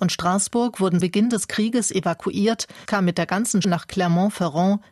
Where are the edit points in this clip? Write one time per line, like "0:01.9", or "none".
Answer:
0:01.0
0:02.9
0:03.6